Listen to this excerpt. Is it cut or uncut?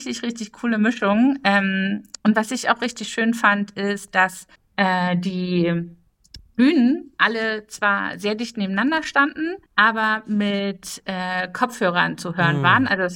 cut